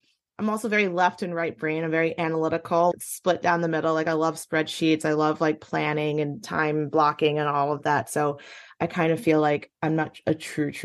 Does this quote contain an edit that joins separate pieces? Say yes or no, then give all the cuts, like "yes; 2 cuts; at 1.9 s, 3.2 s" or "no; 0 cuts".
yes; 2 cuts; at 2.9 s, 9.7 s